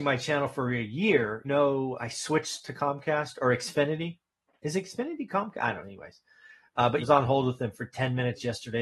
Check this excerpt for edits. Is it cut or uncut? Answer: cut